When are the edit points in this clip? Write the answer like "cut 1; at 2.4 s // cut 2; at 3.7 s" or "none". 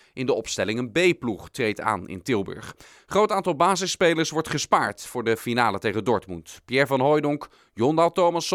none

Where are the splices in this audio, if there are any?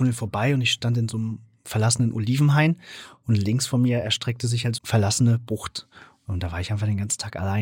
cut 1; at 4.8 s

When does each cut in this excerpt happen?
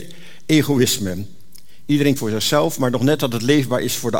cut 1; at 2.2 s

